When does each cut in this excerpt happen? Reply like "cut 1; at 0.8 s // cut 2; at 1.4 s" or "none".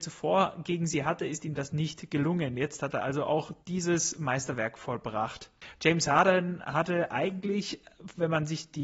cut 1; at 3.6 s